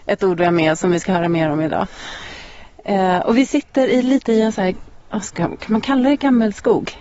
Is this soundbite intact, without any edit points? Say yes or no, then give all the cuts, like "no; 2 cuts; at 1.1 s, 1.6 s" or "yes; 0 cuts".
yes; 0 cuts